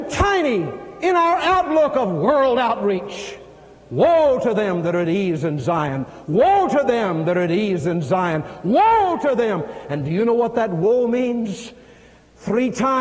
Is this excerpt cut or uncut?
uncut